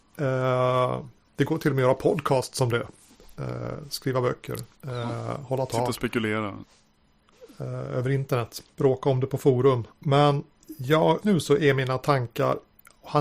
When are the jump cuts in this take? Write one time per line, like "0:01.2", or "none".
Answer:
0:04.7
0:08.7
0:09.9
0:11.2